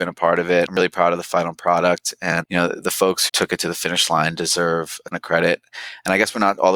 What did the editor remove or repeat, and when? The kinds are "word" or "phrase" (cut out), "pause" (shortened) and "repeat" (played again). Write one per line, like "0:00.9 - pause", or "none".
0:02.4 - word
0:03.3 - word
0:05.1 - word